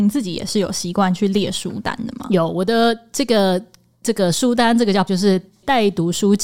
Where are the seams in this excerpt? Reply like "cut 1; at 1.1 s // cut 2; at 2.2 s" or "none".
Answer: cut 1; at 5.1 s